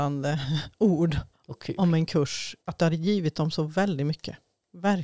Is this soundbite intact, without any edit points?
no; 2 cuts; at 1.3 s, 2.6 s

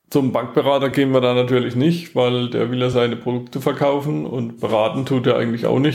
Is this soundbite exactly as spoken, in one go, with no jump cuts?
yes; 0 cuts

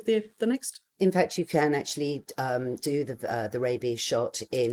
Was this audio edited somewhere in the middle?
no; 0 cuts

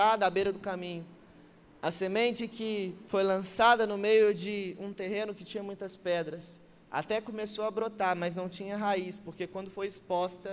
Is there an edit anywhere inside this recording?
no; 0 cuts

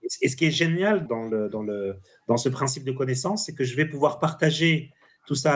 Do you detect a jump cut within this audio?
yes; 1 cut; at 1.0 s

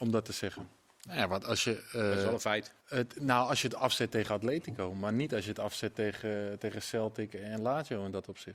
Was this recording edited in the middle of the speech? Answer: yes; 1 cut; at 2.8 s

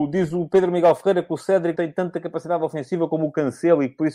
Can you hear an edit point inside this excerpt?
yes; 1 cut; at 1.7 s

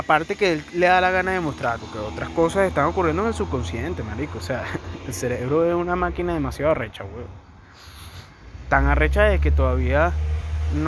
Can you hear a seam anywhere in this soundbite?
yes; 1 cut; at 1.8 s

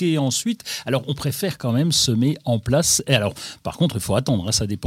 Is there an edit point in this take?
no; 0 cuts

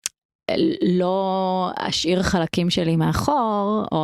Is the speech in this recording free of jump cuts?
yes; 0 cuts

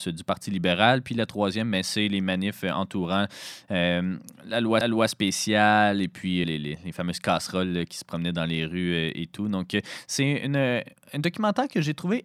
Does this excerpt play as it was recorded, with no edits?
no; 2 cuts; at 4.8 s, 6.4 s

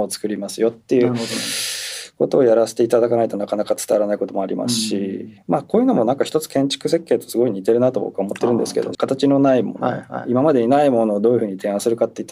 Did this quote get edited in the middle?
yes; 2 cuts; at 5.4 s, 8.9 s

